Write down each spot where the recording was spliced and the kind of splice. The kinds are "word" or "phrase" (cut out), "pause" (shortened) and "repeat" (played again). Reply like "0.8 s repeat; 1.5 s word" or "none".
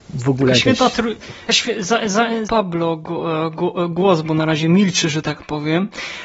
1.5 s word; 2.4 s phrase